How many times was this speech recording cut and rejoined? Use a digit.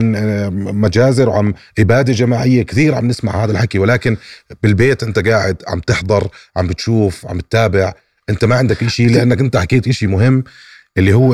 0